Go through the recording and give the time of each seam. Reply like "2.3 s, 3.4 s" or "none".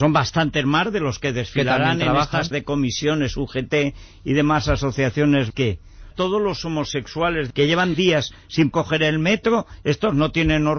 2.5 s, 5.5 s, 6.1 s, 7.5 s, 7.9 s, 8.7 s